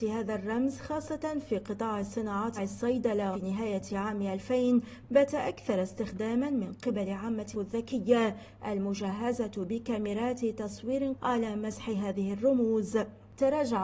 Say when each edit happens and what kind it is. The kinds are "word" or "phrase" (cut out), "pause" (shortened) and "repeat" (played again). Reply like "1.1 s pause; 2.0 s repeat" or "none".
2.6 s phrase; 3.3 s word; 7.5 s phrase; 11.1 s word